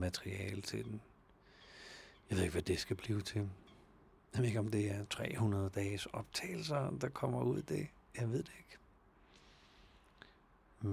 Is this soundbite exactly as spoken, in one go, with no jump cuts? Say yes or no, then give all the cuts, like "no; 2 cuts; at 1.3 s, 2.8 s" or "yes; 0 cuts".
yes; 0 cuts